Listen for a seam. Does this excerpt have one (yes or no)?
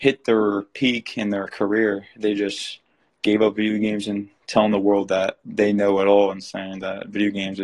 no